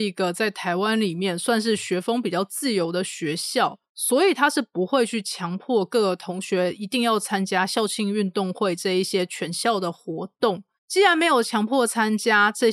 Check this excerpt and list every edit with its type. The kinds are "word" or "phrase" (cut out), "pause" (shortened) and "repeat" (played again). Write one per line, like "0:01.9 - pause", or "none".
0:10.8 - pause